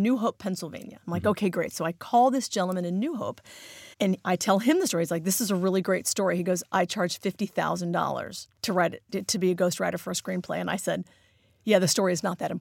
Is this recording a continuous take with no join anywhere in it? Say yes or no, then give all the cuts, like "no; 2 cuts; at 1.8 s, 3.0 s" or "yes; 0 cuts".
no; 2 cuts; at 3.9 s, 8.6 s